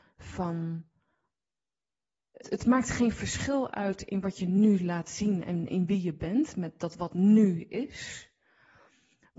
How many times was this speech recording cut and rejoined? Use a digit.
1